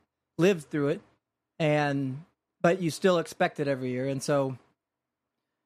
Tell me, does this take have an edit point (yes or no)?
no